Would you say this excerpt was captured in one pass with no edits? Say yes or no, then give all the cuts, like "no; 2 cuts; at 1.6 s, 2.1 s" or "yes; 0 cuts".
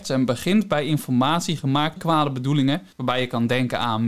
no; 2 cuts; at 2.0 s, 2.9 s